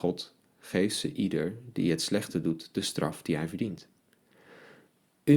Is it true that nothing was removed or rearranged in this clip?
yes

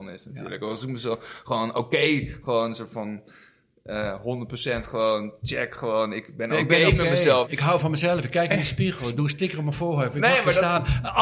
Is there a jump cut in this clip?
no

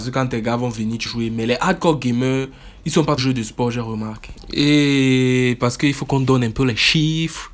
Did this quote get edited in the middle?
yes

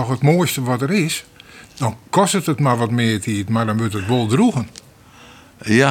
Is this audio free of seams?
yes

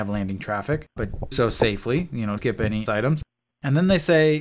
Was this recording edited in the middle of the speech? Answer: yes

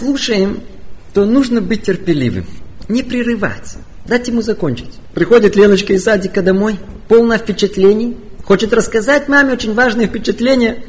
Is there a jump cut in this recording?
no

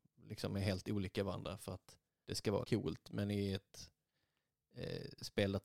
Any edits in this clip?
yes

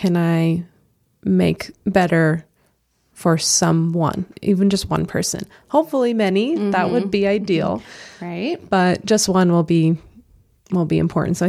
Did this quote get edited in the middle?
no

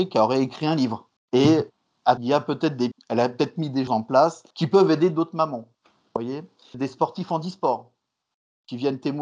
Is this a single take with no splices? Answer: no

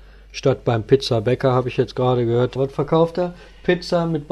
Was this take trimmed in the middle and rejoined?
yes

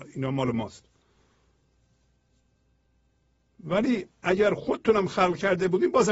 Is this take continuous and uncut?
yes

